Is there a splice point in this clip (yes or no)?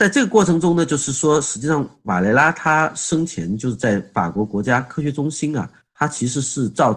no